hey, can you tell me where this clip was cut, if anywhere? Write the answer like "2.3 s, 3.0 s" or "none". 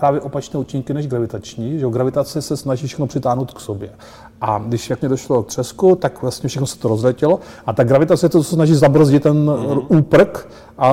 5.0 s, 5.5 s